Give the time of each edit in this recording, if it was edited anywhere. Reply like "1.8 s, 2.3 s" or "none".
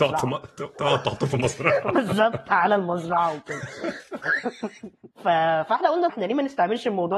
5.1 s, 6.1 s